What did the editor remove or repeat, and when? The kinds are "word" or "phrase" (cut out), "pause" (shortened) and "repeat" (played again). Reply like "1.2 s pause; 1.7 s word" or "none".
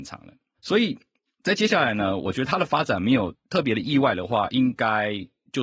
none